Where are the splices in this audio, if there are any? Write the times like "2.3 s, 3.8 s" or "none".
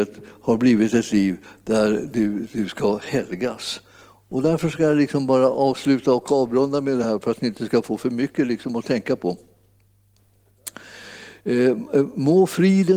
none